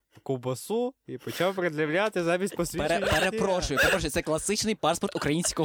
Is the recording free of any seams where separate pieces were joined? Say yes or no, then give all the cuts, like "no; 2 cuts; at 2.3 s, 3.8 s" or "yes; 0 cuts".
yes; 0 cuts